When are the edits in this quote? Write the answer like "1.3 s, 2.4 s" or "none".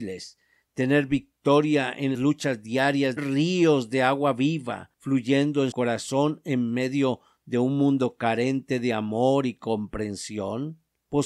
2.1 s, 3.2 s, 4.9 s, 5.7 s